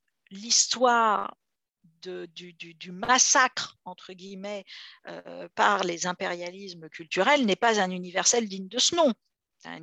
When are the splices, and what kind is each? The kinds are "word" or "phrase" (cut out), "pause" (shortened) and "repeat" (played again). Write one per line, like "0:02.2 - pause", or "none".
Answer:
none